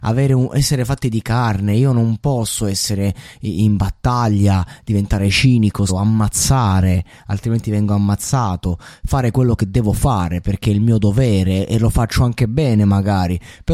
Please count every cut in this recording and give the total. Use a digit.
1